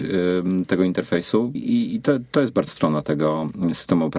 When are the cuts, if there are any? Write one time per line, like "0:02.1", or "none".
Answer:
0:01.5
0:02.7